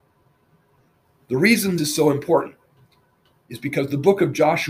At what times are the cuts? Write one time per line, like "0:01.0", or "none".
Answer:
0:01.8

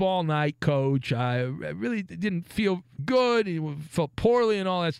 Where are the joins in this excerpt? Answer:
0:03.0

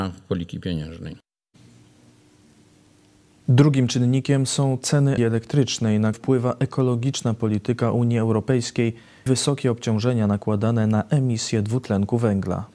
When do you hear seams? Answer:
0:05.2
0:06.1
0:09.3

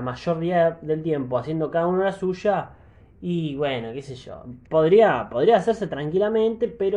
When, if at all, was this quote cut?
none

